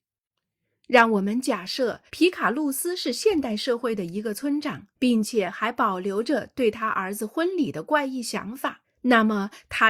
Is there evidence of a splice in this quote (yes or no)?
yes